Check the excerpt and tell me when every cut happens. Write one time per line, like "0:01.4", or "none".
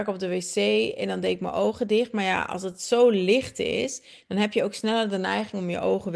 none